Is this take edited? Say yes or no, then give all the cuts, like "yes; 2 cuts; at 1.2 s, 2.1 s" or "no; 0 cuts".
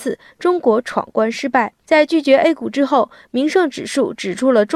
no; 0 cuts